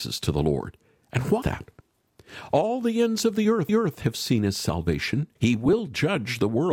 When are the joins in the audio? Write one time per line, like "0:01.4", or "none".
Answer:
0:01.4
0:03.7
0:05.4

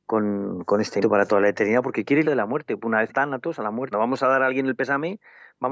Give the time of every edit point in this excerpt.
0:01.0
0:02.2
0:03.1
0:03.9

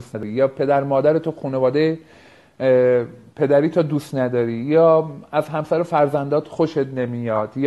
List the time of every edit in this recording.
none

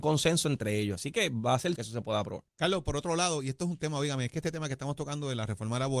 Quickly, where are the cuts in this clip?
0:01.8
0:02.5

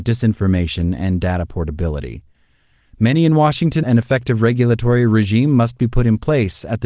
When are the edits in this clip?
0:03.8

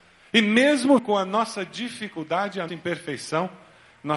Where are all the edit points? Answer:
0:01.0
0:02.7

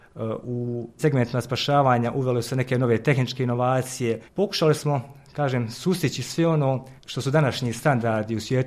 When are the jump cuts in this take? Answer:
0:01.0
0:04.3
0:07.0

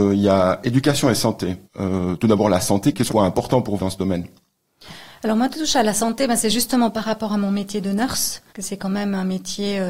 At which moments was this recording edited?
0:01.7
0:03.1
0:03.8
0:05.5
0:08.5

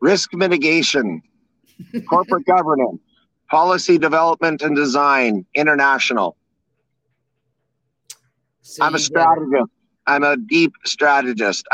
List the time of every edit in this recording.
none

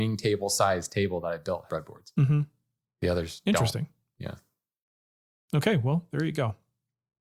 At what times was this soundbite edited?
0:01.7

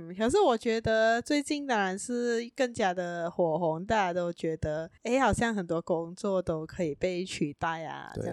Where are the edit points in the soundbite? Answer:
0:05.0

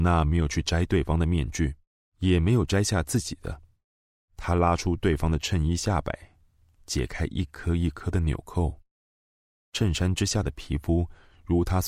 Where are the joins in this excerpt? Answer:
0:01.9

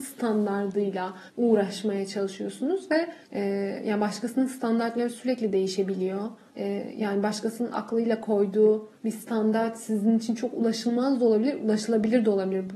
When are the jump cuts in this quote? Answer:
0:01.3
0:03.2
0:06.5
0:09.0

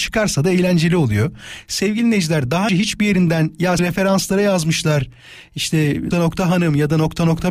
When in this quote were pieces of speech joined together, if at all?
0:02.7
0:03.8
0:06.1

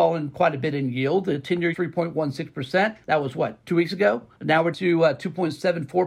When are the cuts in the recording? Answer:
0:01.7
0:03.0
0:03.6
0:04.3
0:04.7

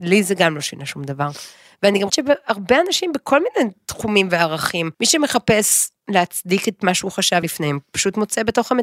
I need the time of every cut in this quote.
0:02.1
0:04.9
0:06.0
0:07.4

